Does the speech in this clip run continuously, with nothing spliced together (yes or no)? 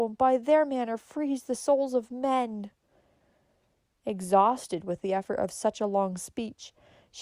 yes